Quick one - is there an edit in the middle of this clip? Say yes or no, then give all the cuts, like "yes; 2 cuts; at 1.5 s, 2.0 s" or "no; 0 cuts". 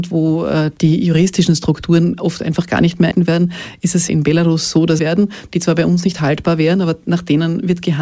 yes; 2 cuts; at 3.1 s, 5.0 s